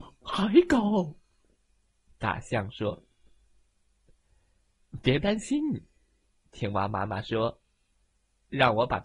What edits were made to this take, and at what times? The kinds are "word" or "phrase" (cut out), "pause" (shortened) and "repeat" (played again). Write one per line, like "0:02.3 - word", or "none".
none